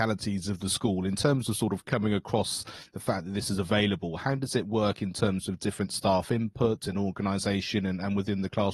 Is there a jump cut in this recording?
no; 0 cuts

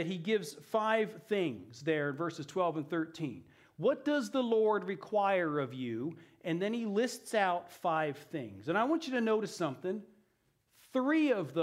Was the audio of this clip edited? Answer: no; 0 cuts

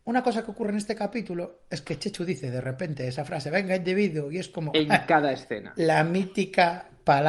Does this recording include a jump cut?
no; 0 cuts

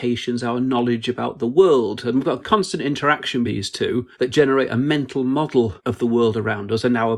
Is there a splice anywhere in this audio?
yes; 4 cuts; at 2.4 s, 3.4 s, 4.1 s, 5.8 s

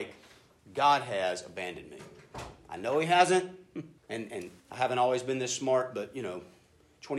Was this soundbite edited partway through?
yes; 2 cuts; at 4.0 s, 4.6 s

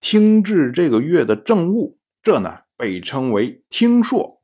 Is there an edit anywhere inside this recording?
yes; 1 cut; at 2.1 s

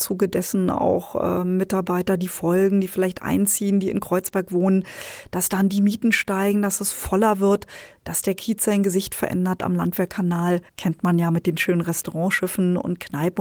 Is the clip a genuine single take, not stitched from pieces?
no; 1 cut; at 10.7 s

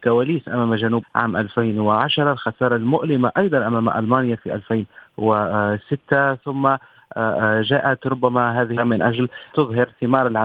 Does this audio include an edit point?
yes; 3 cuts; at 1.0 s, 8.8 s, 9.5 s

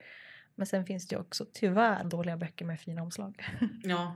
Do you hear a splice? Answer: yes; 1 cut; at 2.0 s

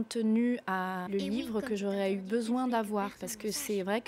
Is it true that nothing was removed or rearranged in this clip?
no; 1 cut; at 1.1 s

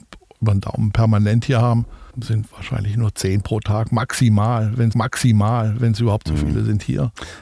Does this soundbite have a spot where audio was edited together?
yes; 2 cuts; at 2.1 s, 4.9 s

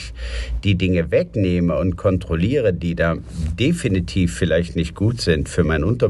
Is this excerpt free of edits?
yes; 0 cuts

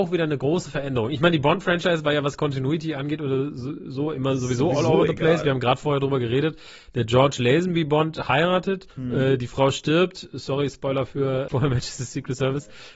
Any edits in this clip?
yes; 1 cut; at 8.9 s

